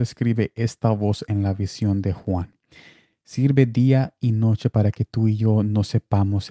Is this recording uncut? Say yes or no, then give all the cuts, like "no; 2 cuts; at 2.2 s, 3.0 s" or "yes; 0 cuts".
yes; 0 cuts